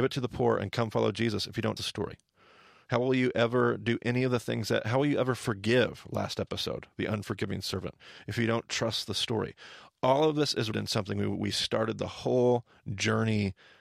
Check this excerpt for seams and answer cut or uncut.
cut